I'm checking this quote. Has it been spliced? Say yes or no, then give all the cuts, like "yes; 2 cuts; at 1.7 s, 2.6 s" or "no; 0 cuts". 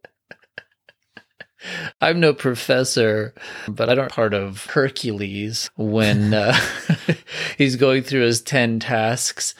yes; 1 cut; at 4.1 s